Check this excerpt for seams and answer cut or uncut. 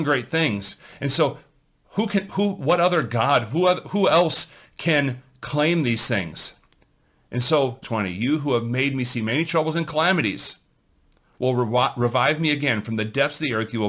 cut